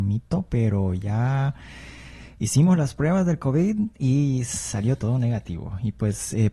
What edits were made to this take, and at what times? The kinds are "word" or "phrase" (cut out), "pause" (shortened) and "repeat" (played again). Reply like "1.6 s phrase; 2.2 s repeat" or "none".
none